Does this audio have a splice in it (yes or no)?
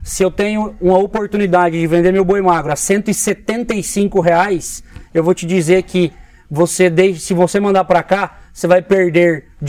no